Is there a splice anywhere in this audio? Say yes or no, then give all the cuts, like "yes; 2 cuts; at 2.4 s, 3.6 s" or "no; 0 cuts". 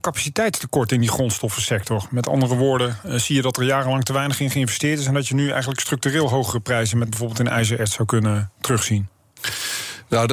yes; 1 cut; at 7.1 s